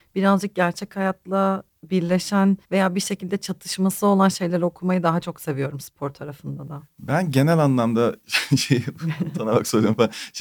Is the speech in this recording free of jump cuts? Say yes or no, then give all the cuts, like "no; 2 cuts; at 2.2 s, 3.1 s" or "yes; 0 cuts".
no; 1 cut; at 2.6 s